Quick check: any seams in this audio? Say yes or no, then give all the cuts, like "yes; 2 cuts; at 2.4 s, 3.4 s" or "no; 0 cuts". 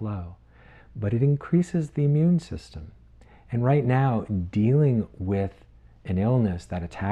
no; 0 cuts